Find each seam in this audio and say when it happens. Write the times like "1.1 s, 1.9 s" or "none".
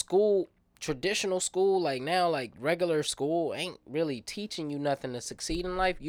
none

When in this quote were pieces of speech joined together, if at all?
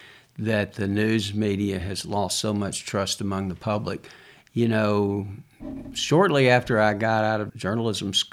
none

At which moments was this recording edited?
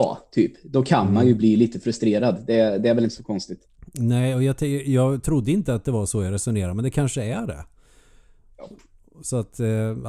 none

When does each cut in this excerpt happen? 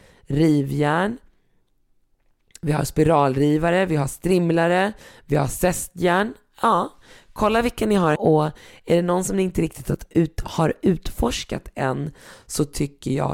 8.2 s

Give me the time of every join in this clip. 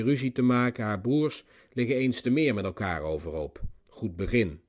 none

